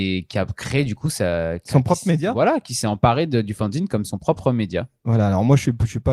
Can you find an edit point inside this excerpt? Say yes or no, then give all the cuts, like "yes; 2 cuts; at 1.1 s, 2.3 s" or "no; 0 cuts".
no; 0 cuts